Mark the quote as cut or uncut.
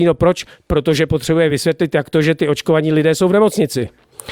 uncut